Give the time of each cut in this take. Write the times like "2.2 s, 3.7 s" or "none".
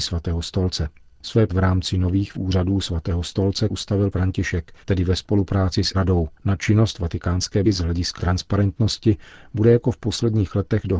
1.5 s, 2.3 s, 3.7 s, 4.1 s, 4.8 s, 5.9 s, 6.4 s, 7.6 s, 8.2 s